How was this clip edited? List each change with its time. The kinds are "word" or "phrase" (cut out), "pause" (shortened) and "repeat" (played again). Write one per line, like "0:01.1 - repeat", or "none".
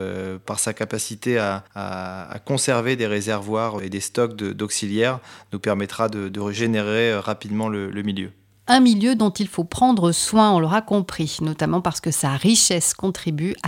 0:01.7 - pause